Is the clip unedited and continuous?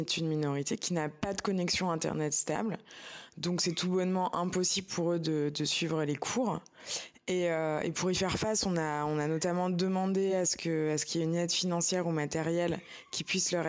yes; 0 cuts

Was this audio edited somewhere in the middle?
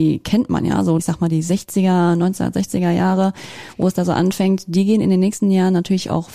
yes; 1 cut; at 1.0 s

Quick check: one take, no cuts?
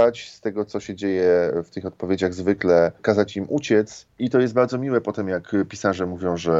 yes; 0 cuts

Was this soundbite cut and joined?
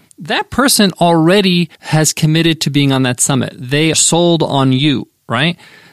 yes; 2 cuts; at 1.7 s, 3.9 s

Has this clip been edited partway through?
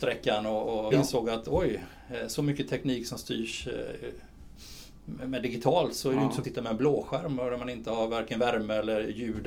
yes; 2 cuts; at 0.9 s, 6.4 s

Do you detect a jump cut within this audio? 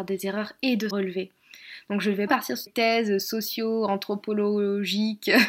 yes; 3 cuts; at 0.9 s, 2.3 s, 2.7 s

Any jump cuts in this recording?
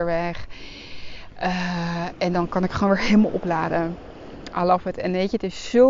no; 0 cuts

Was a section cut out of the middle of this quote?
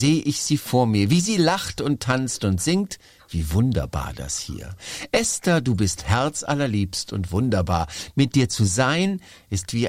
no; 0 cuts

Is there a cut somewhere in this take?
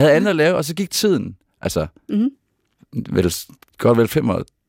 no; 0 cuts

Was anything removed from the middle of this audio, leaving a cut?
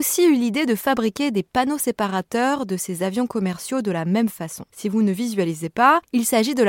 yes; 1 cut; at 4.7 s

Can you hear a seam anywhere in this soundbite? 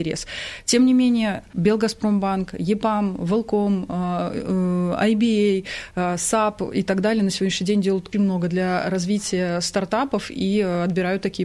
yes; 1 cut; at 8.1 s

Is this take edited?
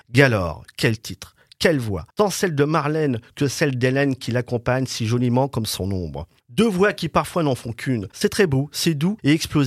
no; 0 cuts

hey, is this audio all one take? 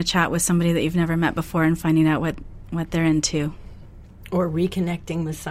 yes; 0 cuts

